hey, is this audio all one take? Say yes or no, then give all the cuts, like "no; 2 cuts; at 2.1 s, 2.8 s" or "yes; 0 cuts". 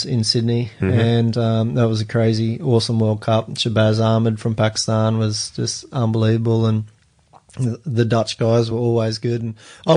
yes; 0 cuts